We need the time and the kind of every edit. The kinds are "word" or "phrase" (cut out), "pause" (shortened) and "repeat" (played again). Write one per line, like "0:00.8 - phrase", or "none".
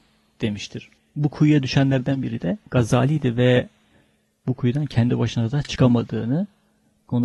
none